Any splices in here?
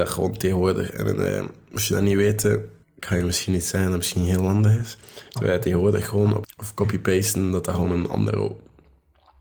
yes; 2 cuts; at 2.8 s, 6.4 s

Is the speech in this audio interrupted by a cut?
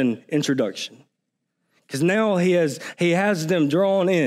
no; 0 cuts

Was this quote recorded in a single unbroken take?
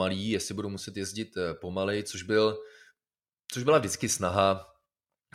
yes; 0 cuts

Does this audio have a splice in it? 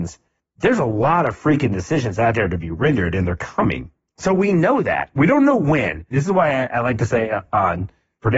no; 0 cuts

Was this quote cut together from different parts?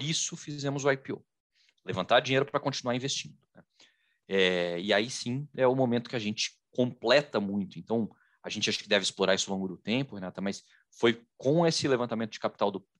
no; 0 cuts

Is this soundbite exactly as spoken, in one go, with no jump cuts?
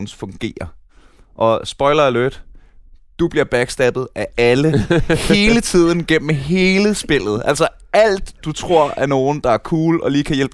yes; 0 cuts

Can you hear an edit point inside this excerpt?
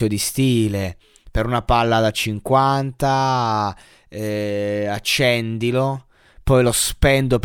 no; 0 cuts

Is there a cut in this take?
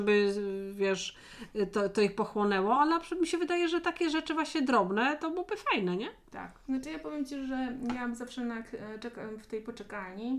no; 0 cuts

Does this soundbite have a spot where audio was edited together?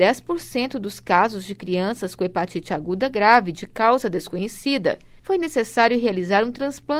no; 0 cuts

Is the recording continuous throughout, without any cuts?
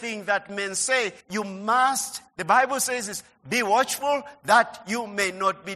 no; 2 cuts; at 1.2 s, 2.3 s

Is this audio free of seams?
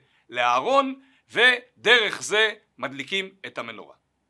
yes; 0 cuts

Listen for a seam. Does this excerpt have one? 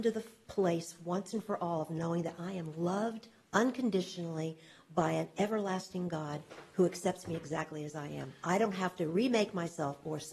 no; 0 cuts

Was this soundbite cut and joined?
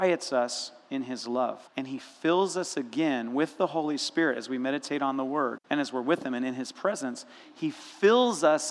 yes; 2 cuts; at 1.7 s, 5.6 s

